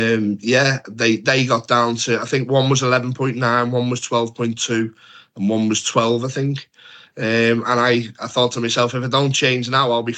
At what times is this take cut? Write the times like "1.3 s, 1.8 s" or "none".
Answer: none

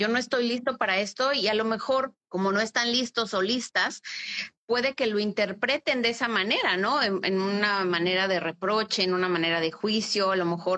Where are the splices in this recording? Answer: 2.2 s, 4.6 s

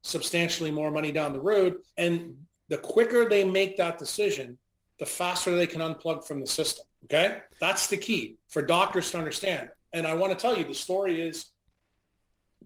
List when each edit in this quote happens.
1.9 s, 4.9 s, 6.9 s, 8.4 s

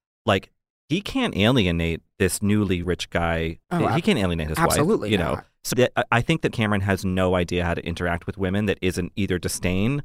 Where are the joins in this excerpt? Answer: 2.8 s, 3.6 s, 5.7 s, 6.5 s

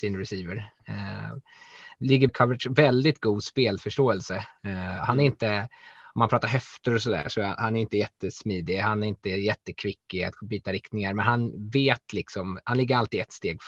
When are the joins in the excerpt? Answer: 2.3 s

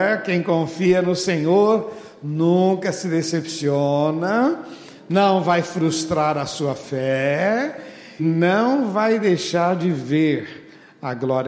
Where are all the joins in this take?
8.2 s

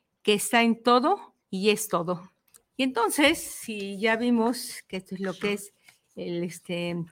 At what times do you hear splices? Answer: 1.4 s, 2.5 s

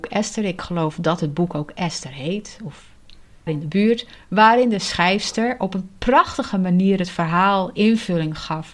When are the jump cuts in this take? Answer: 3.5 s

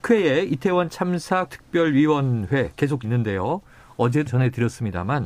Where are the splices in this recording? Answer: 1.4 s, 3.0 s, 4.3 s

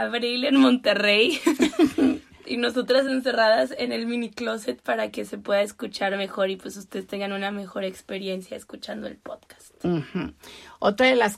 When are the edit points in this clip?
none

